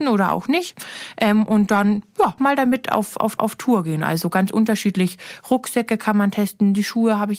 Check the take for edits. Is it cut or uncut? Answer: cut